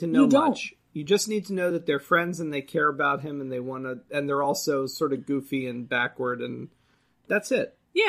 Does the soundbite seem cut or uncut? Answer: uncut